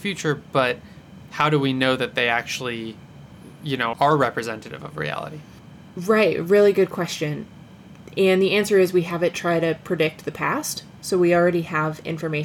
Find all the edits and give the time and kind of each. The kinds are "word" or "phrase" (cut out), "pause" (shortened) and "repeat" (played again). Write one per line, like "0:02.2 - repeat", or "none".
0:03.9 - word